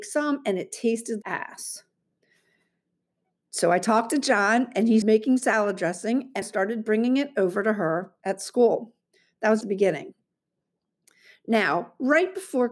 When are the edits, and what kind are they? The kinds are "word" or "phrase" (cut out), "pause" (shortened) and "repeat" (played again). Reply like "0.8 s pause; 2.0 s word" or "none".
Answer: 1.2 s word; 5.0 s word; 6.4 s word; 9.6 s word